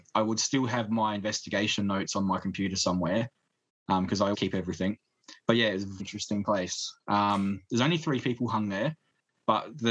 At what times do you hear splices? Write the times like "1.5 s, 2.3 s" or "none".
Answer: 4.3 s, 5.4 s, 6.0 s

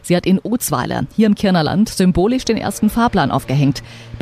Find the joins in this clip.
none

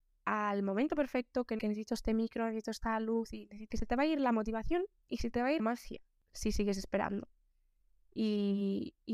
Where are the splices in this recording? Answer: 1.6 s, 3.7 s, 5.6 s

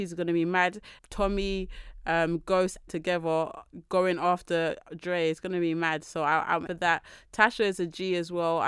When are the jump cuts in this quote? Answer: 1.0 s, 2.9 s, 6.7 s

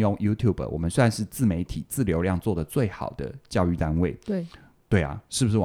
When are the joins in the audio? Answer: none

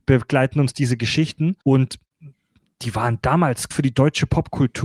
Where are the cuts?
1.6 s, 3.7 s

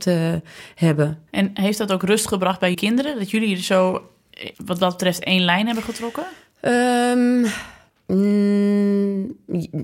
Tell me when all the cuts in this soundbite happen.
1.3 s, 2.7 s, 4.5 s, 7.9 s

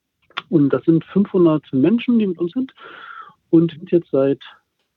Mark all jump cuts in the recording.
2.5 s, 3.8 s

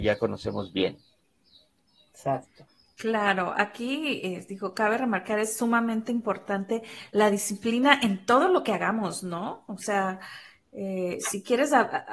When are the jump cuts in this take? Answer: none

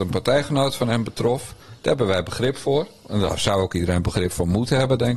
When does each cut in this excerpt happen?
none

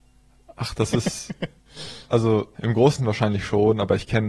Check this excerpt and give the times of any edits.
2.5 s, 3.0 s

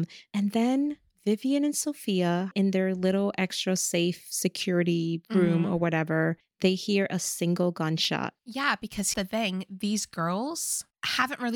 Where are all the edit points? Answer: 2.5 s, 9.1 s

